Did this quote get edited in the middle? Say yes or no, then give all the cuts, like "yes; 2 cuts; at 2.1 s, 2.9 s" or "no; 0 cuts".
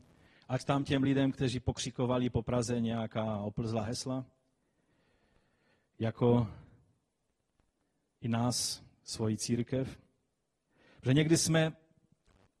no; 0 cuts